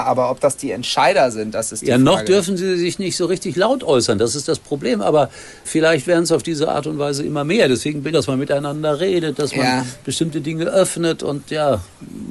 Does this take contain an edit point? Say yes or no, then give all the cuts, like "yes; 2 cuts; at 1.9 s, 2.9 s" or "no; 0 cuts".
yes; 2 cuts; at 5.6 s, 8.1 s